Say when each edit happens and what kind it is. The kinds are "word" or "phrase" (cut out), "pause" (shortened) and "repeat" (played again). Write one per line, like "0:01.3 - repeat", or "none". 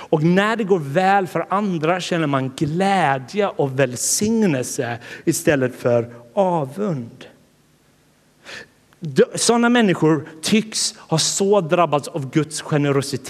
none